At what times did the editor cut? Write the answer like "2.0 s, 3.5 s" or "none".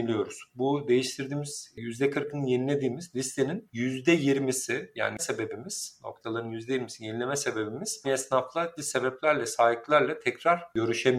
5.2 s, 8.0 s, 8.8 s